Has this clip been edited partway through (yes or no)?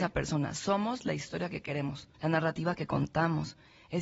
yes